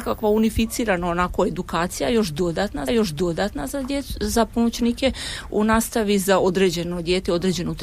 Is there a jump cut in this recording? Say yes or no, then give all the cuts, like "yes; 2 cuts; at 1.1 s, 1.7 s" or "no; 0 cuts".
yes; 2 cuts; at 2.9 s, 5.5 s